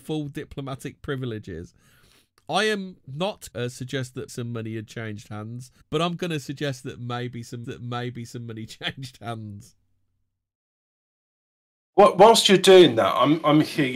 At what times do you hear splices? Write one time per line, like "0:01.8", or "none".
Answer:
0:03.5
0:04.3
0:05.8
0:07.6